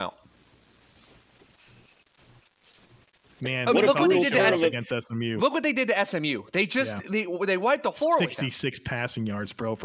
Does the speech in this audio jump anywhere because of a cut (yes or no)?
no